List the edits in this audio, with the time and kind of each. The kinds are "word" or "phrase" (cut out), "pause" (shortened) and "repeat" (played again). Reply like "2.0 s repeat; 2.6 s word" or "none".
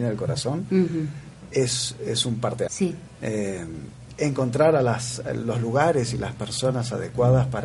2.7 s word